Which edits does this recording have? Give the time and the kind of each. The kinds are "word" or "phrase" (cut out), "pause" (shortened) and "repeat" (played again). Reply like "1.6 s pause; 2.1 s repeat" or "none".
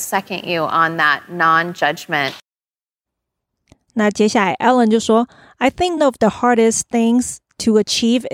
6.0 s word